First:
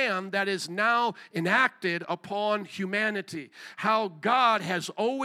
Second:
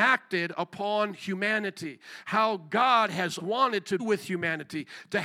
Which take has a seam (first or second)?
second